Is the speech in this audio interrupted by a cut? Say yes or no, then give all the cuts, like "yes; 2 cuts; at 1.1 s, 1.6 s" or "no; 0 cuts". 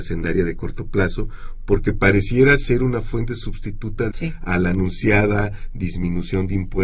yes; 1 cut; at 4.1 s